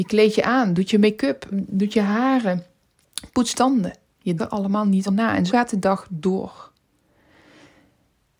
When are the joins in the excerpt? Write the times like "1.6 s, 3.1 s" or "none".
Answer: 1.5 s, 3.5 s, 4.4 s, 5.1 s, 5.5 s